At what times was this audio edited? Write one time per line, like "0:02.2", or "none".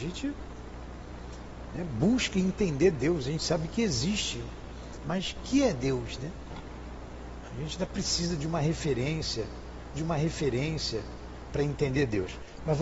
0:09.9